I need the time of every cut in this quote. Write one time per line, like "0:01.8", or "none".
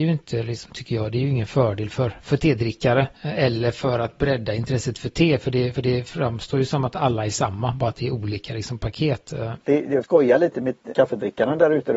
0:03.1
0:05.7
0:10.0
0:10.9